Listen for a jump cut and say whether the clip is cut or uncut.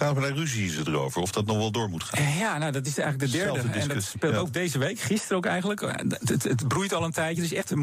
uncut